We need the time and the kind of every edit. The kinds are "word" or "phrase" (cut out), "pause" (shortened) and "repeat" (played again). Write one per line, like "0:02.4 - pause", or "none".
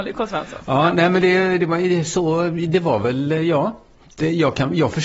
none